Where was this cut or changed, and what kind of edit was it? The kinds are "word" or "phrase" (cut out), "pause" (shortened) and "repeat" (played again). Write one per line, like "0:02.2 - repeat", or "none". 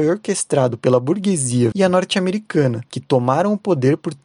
0:01.7 - word